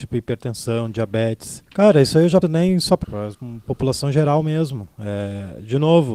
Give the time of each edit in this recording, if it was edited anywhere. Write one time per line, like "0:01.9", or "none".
0:01.7
0:02.4
0:03.0
0:03.3